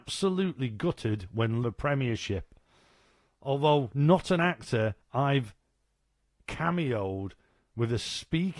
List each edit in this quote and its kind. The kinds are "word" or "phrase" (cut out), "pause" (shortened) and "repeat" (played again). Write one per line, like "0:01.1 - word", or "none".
0:01.6 - phrase
0:05.0 - pause